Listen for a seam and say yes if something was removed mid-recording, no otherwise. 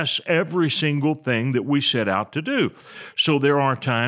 no